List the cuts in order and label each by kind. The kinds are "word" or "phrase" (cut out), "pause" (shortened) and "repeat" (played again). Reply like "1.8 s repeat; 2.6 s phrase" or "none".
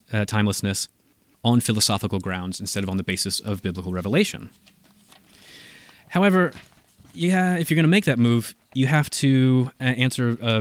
none